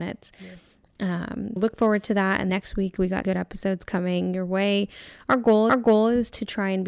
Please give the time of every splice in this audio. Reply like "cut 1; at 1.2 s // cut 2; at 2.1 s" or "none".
cut 1; at 1.6 s // cut 2; at 2.5 s // cut 3; at 3.2 s // cut 4; at 5.7 s